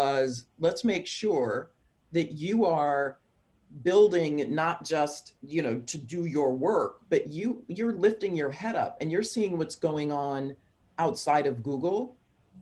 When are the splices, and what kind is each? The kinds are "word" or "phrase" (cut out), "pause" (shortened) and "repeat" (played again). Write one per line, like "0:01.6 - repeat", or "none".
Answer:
none